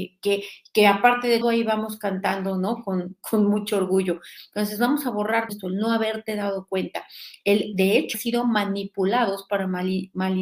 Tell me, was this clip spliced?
yes; 3 cuts; at 1.4 s, 5.5 s, 8.1 s

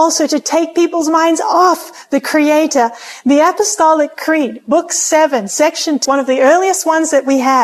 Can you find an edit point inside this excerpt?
yes; 1 cut; at 6.0 s

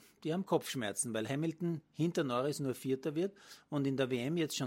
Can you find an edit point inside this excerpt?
no; 0 cuts

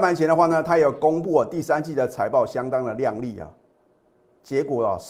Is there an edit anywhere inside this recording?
no; 0 cuts

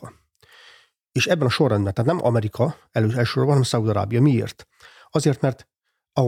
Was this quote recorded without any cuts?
yes; 0 cuts

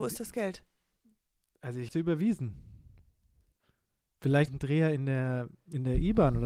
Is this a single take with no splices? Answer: no; 2 cuts; at 1.9 s, 4.5 s

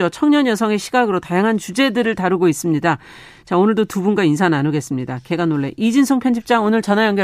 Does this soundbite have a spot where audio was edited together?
no; 0 cuts

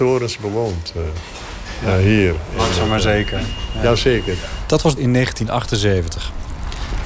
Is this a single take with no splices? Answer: no; 1 cut; at 5.0 s

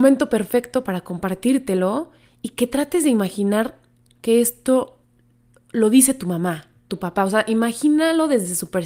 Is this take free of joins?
yes; 0 cuts

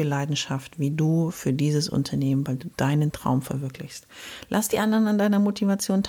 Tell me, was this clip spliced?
no; 0 cuts

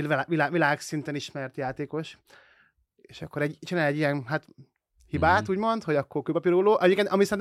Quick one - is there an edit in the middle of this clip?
no; 0 cuts

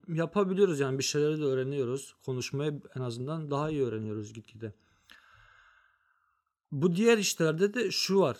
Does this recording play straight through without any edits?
yes; 0 cuts

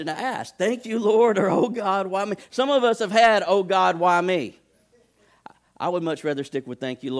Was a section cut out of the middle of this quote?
no; 0 cuts

